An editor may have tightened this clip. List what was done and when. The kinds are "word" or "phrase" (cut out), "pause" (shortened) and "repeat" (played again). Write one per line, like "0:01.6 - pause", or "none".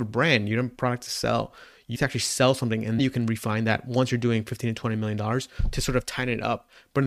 0:02.0 - word
0:03.0 - word